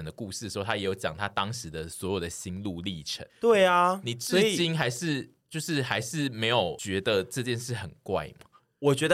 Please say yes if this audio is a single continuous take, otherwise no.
no